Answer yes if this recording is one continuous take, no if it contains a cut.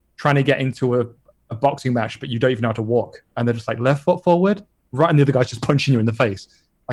yes